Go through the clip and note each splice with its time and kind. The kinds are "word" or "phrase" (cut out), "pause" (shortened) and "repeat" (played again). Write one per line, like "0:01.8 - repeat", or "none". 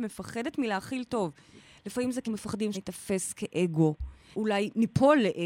0:02.2 - word
0:02.7 - word
0:04.3 - word